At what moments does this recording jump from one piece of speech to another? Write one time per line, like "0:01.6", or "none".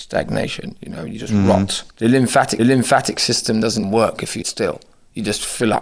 0:01.9
0:02.6
0:03.8
0:04.4